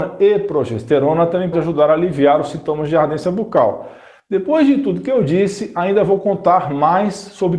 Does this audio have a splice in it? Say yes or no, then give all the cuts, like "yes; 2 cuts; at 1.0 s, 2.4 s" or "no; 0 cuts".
yes; 1 cut; at 1.5 s